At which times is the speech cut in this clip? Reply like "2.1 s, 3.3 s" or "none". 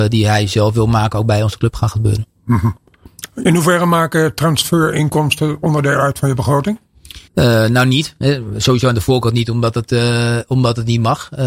7.3 s